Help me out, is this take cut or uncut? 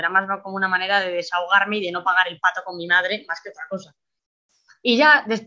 uncut